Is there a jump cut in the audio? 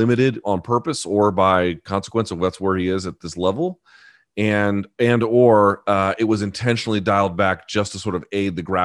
no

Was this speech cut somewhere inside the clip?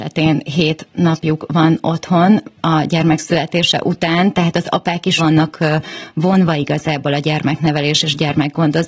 yes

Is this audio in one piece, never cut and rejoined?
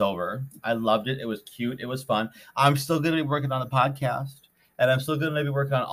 yes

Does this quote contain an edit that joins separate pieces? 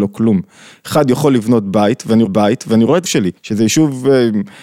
yes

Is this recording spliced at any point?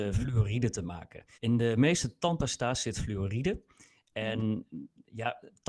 yes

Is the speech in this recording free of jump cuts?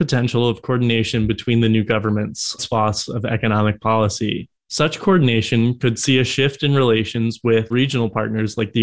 no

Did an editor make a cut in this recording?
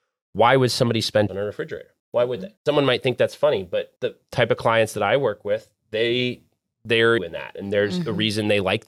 yes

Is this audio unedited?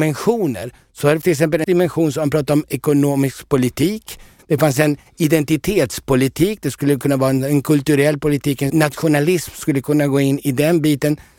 no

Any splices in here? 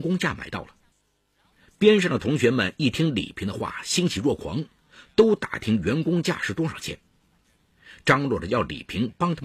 yes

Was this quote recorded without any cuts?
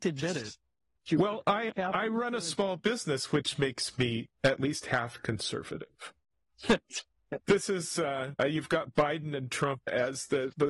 no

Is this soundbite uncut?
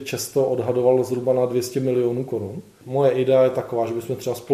yes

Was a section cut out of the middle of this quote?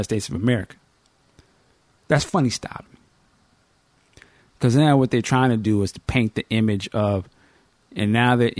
no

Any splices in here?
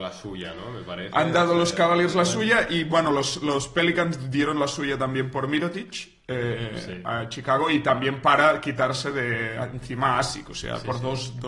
no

